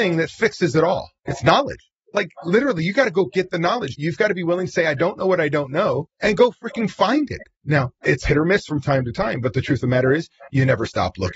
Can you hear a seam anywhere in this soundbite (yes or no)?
yes